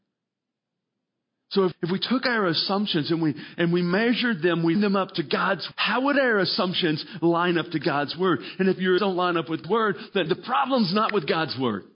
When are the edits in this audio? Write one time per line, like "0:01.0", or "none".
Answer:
0:01.7
0:04.8
0:05.7
0:09.0
0:09.6
0:10.3